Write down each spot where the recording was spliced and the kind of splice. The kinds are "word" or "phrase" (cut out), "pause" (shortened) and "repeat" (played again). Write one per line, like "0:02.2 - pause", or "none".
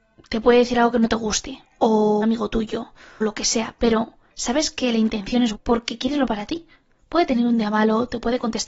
0:02.2 - word
0:03.2 - word
0:05.5 - word
0:06.2 - word